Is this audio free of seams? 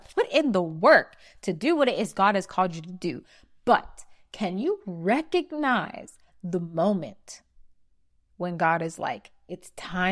yes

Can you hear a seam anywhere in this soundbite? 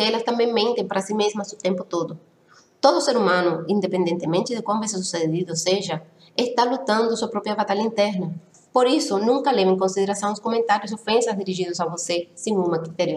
no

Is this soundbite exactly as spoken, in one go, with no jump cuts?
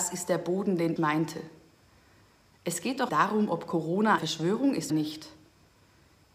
no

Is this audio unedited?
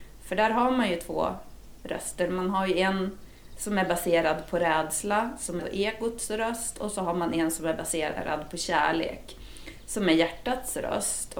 no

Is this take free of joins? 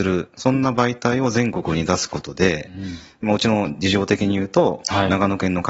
no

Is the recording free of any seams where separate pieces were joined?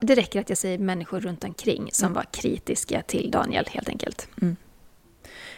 yes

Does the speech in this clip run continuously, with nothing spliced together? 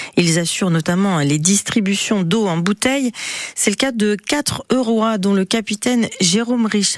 yes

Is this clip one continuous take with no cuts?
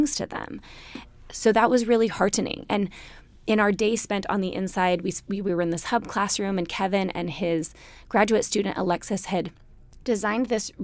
yes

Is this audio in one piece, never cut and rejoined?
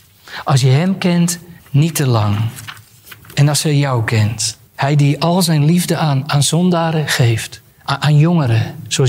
no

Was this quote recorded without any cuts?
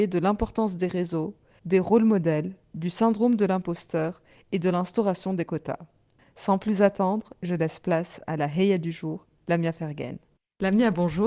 yes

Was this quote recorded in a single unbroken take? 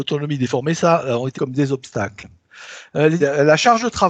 no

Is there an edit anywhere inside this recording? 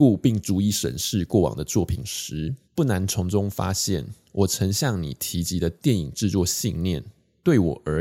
yes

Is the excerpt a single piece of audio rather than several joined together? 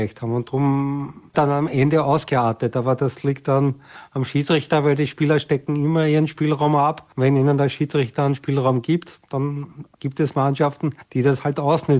no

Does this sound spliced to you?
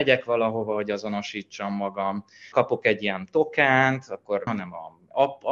yes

